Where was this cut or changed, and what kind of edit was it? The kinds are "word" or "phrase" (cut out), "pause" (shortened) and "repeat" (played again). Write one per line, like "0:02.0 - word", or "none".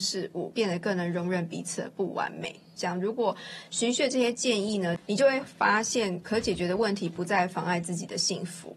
0:06.2 - word